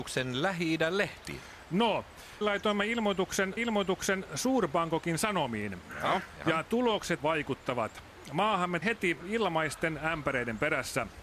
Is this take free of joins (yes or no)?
no